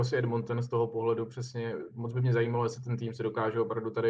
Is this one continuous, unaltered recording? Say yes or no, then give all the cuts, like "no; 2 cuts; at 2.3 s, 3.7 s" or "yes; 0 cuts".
yes; 0 cuts